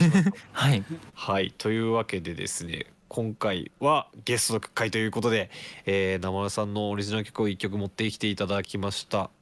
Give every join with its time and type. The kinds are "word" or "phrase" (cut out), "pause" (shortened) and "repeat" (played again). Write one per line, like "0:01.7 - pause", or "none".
0:01.1 - pause